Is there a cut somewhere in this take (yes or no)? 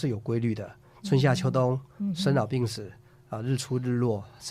no